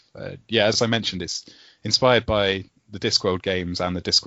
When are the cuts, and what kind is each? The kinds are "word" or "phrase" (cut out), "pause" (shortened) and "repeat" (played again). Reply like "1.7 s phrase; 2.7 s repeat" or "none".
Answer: none